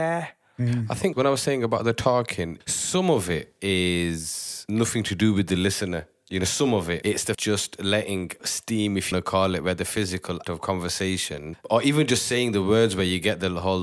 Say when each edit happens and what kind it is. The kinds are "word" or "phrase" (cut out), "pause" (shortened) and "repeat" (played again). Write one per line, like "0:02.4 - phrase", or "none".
0:07.3 - phrase
0:08.4 - word
0:09.1 - phrase
0:10.4 - word